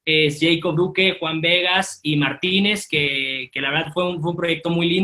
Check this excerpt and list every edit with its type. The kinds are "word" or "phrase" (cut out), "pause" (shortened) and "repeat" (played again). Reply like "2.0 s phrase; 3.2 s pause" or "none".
none